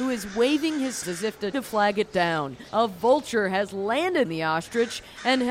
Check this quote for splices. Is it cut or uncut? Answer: cut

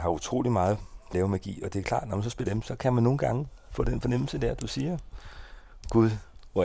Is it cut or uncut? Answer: cut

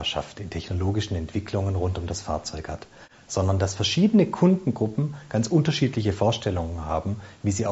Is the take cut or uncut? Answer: uncut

